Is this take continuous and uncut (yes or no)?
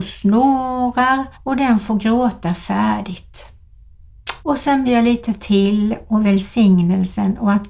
no